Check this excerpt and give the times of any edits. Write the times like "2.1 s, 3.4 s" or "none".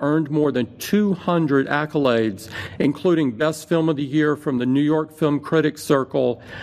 none